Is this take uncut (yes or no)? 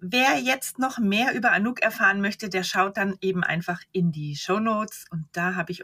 yes